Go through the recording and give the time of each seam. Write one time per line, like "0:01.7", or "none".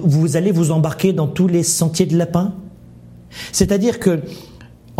none